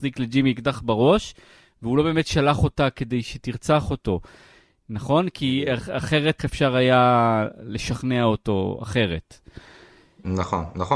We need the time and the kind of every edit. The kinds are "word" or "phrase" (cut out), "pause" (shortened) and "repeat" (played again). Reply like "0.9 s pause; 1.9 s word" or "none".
6.4 s phrase